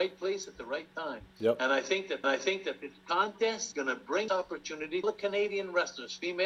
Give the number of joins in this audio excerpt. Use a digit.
5